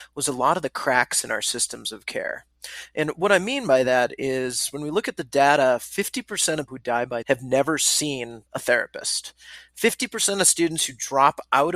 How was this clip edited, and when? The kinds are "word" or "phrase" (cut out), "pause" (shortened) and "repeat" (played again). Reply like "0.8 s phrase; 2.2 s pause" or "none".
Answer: 6.7 s word; 7.2 s word; 8.5 s pause

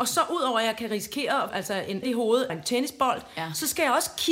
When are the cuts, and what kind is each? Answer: 1.5 s word; 2.0 s word; 2.5 s word

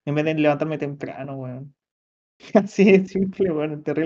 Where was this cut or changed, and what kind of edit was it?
none

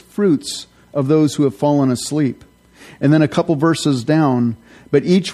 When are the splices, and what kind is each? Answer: none

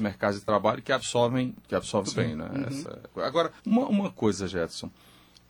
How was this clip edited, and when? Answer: 1.6 s pause; 2.0 s word; 3.1 s word; 3.6 s pause

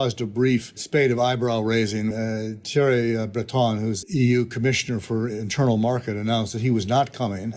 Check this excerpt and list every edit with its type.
2.1 s word; 4.0 s word

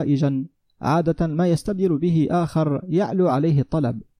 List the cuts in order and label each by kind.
none

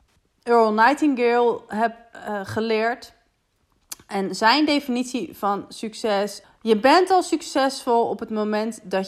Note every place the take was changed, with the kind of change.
6.4 s word

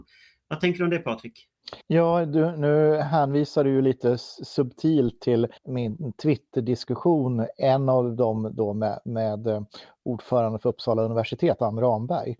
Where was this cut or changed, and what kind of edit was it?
1.8 s pause; 5.6 s pause

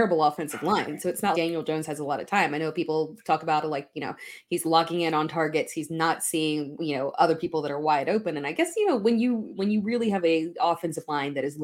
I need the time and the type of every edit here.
1.3 s word

